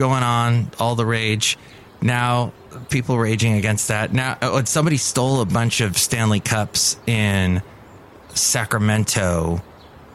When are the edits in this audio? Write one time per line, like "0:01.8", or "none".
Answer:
none